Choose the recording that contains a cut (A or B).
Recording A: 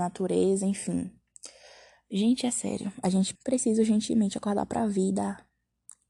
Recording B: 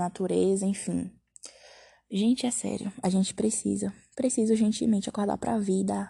A